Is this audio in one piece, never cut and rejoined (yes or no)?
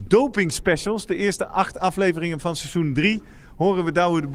yes